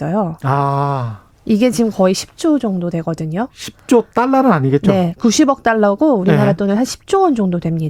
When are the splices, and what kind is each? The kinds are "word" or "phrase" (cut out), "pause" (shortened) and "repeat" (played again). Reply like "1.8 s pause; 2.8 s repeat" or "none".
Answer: none